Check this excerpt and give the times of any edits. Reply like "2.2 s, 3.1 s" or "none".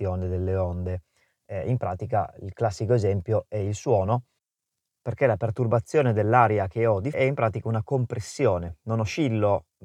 7.1 s